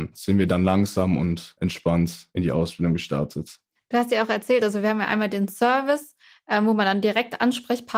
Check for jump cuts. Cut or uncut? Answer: uncut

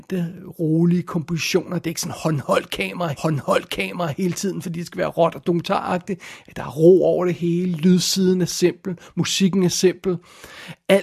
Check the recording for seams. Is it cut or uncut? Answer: cut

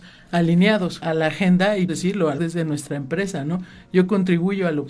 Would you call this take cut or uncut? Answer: cut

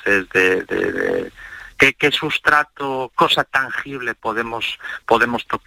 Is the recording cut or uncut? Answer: cut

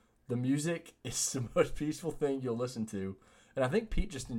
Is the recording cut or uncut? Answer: uncut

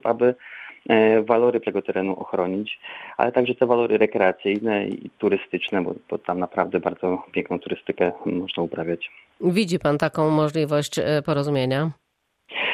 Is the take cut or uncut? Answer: cut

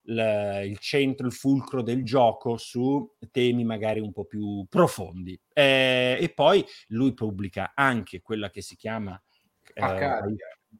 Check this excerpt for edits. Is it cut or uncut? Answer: uncut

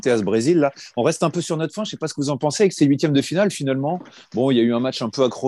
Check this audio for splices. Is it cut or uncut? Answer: uncut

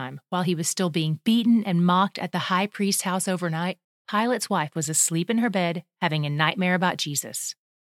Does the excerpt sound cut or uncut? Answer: cut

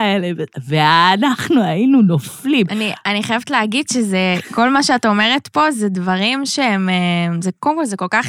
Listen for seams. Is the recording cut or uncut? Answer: uncut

